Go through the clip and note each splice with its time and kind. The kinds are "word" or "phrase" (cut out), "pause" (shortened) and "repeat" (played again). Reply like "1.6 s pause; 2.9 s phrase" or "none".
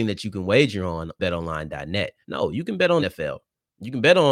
1.2 s word; 2.2 s pause; 3.0 s word